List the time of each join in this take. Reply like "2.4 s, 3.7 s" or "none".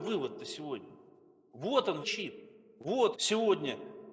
2.0 s, 3.1 s